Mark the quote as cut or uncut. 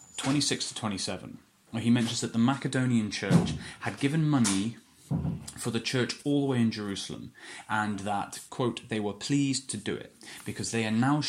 uncut